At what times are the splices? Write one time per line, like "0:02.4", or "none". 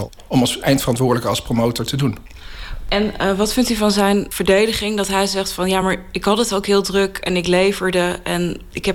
none